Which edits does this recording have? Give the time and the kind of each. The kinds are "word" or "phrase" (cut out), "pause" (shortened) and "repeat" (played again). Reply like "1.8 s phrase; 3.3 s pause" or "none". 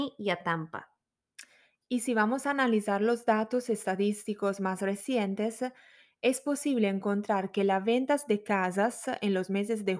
none